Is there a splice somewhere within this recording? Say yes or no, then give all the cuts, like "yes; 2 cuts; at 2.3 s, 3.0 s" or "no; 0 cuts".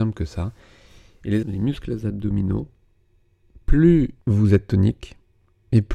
yes; 2 cuts; at 1.4 s, 4.2 s